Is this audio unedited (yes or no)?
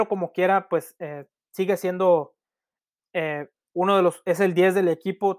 yes